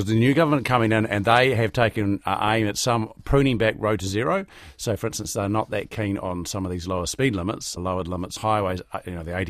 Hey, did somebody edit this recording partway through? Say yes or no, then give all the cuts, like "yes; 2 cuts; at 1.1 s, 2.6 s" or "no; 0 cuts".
yes; 2 cuts; at 7.8 s, 8.4 s